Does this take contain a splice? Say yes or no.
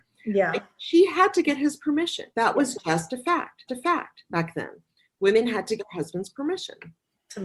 yes